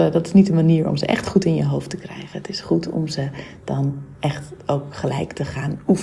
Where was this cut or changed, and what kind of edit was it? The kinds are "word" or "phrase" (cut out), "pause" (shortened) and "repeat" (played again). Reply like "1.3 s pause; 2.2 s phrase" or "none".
none